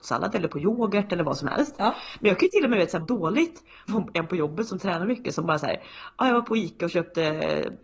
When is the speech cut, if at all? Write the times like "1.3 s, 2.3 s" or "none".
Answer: 3.0 s, 3.9 s